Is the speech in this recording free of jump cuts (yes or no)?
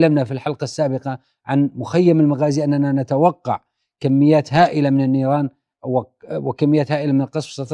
yes